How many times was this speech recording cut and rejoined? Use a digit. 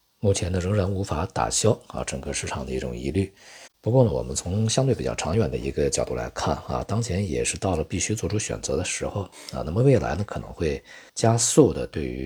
2